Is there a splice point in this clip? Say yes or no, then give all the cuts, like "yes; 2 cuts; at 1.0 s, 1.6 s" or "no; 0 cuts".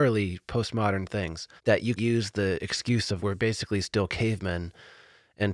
yes; 3 cuts; at 1.6 s, 2.0 s, 3.2 s